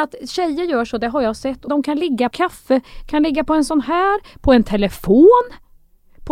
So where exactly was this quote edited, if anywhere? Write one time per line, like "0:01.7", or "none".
0:01.7
0:02.3